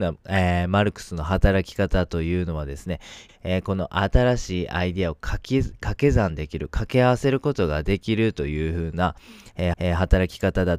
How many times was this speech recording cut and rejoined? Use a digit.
2